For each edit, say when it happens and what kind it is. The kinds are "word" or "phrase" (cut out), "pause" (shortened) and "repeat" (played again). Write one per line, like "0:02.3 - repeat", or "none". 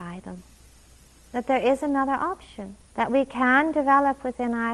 0:02.9 - pause